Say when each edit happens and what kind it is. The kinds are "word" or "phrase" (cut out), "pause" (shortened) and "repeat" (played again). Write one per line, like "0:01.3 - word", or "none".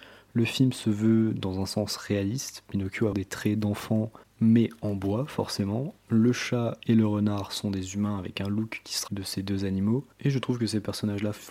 0:03.1 - word
0:09.1 - word
0:10.1 - pause